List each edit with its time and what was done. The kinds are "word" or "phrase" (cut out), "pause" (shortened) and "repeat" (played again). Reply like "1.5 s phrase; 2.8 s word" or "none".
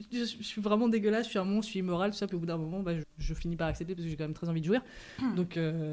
3.0 s word